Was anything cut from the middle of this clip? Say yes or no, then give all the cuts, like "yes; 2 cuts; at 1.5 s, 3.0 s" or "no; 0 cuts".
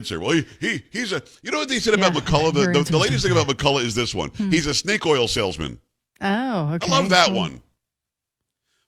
no; 0 cuts